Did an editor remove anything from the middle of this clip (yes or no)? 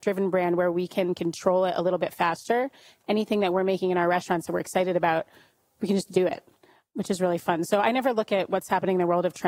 no